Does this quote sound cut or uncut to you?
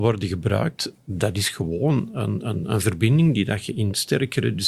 uncut